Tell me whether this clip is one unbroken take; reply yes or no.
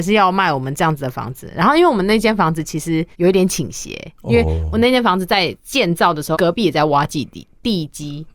no